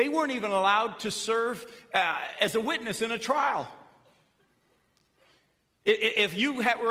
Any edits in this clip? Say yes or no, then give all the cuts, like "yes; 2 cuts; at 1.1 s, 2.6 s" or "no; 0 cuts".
no; 0 cuts